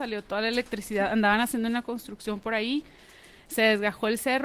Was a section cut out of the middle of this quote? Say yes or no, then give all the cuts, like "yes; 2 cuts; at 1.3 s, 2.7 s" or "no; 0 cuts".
no; 0 cuts